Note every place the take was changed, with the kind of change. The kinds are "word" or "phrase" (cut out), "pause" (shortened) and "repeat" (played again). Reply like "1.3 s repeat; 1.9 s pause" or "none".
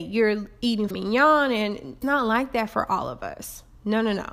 0.9 s word; 2.0 s word